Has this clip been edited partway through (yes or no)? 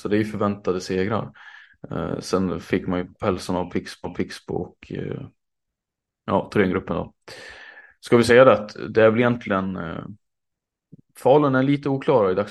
yes